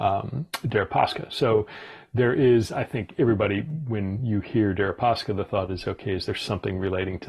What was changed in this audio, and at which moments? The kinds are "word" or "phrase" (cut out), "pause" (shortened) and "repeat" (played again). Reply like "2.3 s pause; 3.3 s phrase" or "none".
none